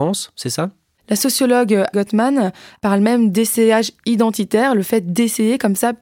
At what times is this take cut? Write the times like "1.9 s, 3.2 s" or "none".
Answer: 1.9 s